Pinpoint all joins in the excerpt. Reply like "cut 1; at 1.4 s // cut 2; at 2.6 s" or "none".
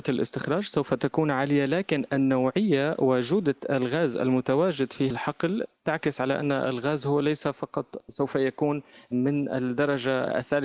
cut 1; at 5.1 s